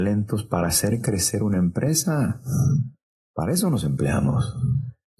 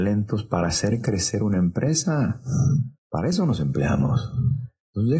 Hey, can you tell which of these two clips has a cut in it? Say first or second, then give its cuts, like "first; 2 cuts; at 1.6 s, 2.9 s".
second; 1 cut; at 3.0 s